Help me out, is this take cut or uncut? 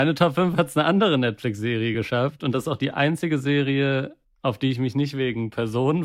uncut